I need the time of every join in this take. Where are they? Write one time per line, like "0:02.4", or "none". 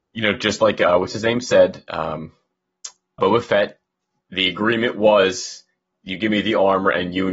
0:03.2